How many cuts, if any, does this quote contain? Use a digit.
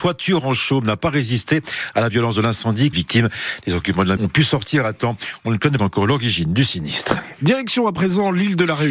3